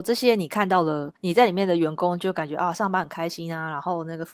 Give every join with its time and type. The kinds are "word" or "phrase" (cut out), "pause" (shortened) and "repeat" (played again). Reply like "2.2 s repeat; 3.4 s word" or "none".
1.2 s pause